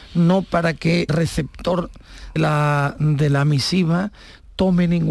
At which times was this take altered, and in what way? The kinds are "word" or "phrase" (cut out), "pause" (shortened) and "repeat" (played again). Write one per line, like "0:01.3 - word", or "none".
0:01.1 - word
0:02.4 - word